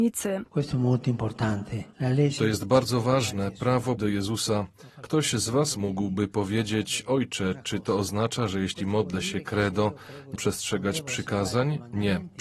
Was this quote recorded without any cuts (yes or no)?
no